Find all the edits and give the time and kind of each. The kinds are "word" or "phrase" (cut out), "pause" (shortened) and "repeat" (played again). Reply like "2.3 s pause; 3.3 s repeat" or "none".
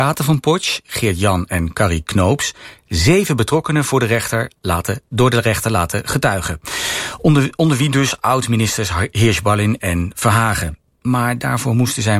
none